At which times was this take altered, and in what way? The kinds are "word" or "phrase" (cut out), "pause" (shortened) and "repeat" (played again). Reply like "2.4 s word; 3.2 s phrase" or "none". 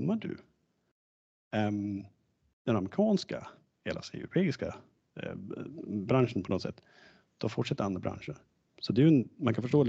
none

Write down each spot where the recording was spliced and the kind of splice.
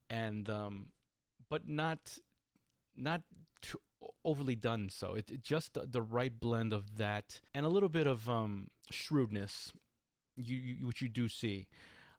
2.4 s pause; 7.5 s pause; 8.8 s pause

